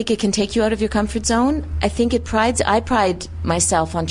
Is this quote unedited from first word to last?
yes; 0 cuts

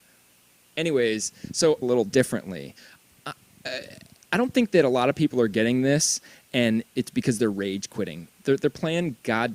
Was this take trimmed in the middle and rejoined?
yes; 1 cut; at 1.8 s

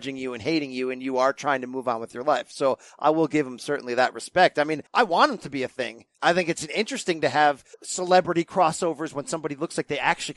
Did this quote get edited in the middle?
yes; 3 cuts; at 4.9 s, 6.1 s, 7.7 s

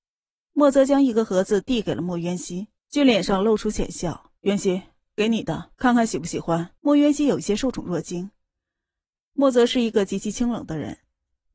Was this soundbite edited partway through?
yes; 4 cuts; at 2.8 s, 4.4 s, 5.7 s, 6.8 s

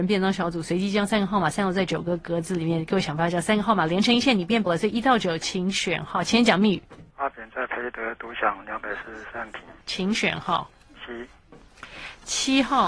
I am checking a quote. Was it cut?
yes; 3 cuts; at 4.7 s, 7.1 s, 9.8 s

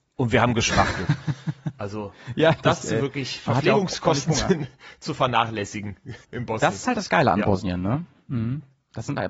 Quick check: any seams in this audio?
yes; 2 cuts; at 2.8 s, 6.2 s

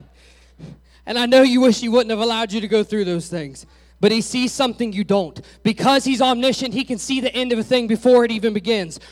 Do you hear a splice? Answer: no; 0 cuts

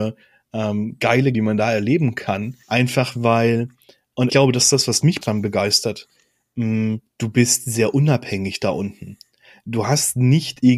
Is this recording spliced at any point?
yes; 5 cuts; at 1.3 s, 2.6 s, 4.3 s, 5.2 s, 7.1 s

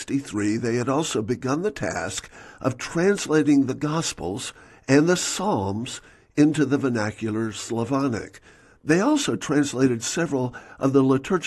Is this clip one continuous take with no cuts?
yes; 0 cuts

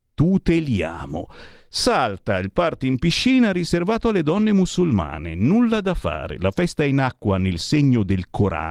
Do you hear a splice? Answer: no; 0 cuts

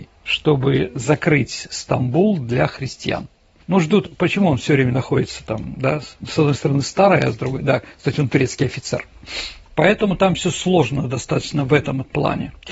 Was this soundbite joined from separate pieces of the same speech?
no; 0 cuts

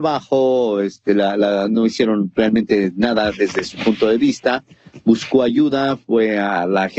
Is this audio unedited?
yes; 0 cuts

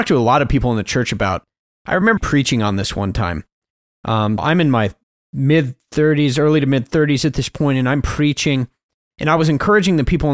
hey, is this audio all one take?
no; 2 cuts; at 2.2 s, 4.4 s

